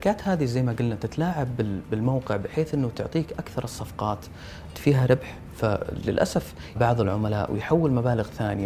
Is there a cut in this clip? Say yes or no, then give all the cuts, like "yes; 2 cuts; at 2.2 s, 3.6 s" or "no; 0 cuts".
yes; 2 cuts; at 4.7 s, 6.8 s